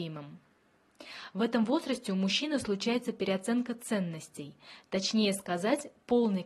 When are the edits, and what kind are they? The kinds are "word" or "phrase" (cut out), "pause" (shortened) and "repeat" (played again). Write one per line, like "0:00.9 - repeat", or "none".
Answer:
none